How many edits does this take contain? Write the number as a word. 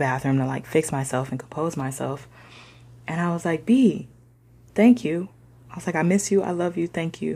zero